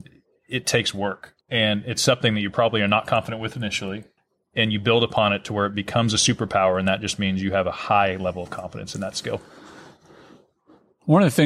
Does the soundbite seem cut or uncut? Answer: cut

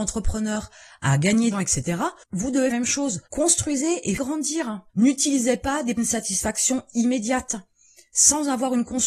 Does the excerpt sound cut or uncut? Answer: cut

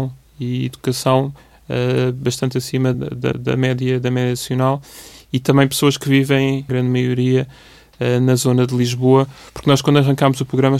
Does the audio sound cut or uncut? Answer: cut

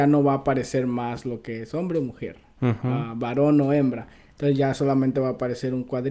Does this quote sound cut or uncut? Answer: uncut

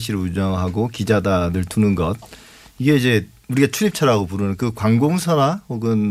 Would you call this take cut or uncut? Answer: uncut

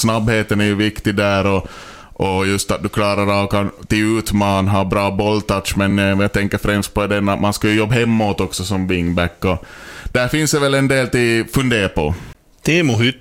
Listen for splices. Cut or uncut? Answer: uncut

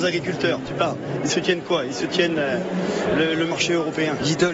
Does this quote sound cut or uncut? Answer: uncut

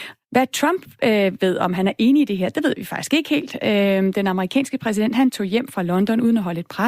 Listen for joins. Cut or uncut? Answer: uncut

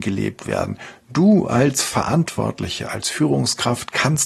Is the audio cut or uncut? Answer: uncut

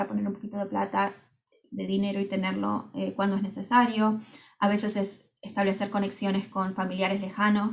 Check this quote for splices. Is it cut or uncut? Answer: uncut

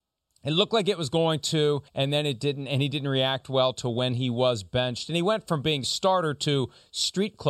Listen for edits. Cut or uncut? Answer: cut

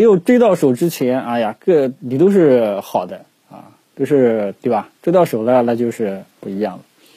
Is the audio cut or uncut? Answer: cut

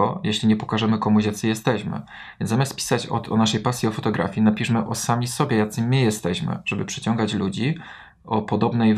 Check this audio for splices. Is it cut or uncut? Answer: uncut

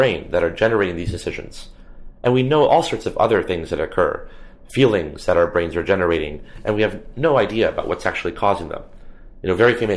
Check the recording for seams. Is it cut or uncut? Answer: uncut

